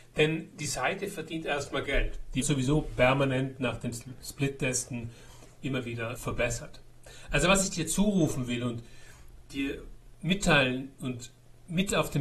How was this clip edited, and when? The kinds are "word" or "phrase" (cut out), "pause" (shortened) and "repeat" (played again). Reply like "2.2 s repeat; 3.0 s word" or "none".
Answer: 1.9 s word; 2.4 s word; 6.2 s word